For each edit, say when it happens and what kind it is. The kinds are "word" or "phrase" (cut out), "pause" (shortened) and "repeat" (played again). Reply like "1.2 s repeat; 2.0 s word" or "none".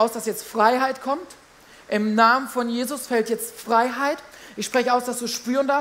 none